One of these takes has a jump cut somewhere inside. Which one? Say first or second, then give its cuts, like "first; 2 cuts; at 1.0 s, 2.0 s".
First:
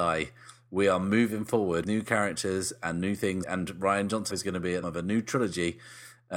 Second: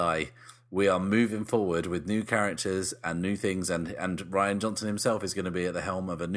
first; 4 cuts; at 1.8 s, 3.4 s, 4.3 s, 4.8 s